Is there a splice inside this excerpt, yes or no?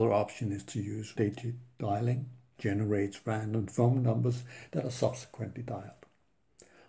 yes